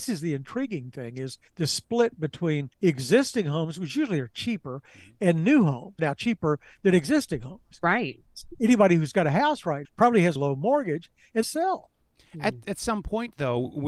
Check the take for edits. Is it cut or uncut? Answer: cut